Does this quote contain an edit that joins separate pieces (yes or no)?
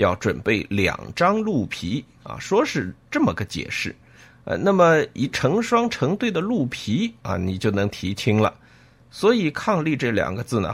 no